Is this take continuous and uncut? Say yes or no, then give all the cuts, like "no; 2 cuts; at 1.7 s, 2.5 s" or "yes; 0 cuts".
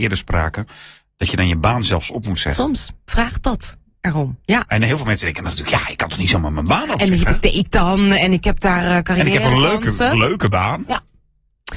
yes; 0 cuts